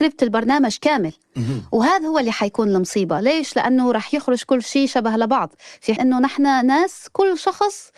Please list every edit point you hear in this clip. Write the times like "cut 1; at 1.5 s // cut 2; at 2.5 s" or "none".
cut 1; at 6.0 s